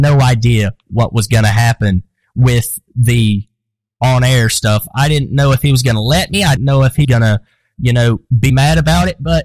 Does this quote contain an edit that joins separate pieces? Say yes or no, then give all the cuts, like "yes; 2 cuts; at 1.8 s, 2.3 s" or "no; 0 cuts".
yes; 3 cuts; at 6.6 s, 7.0 s, 8.5 s